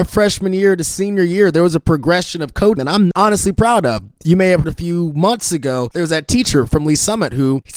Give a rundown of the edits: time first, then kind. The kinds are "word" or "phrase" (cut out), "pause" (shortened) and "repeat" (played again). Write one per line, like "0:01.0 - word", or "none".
0:02.8 - word
0:03.1 - word
0:04.6 - word